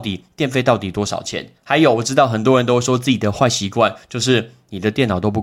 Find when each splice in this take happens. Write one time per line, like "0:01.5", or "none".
0:01.6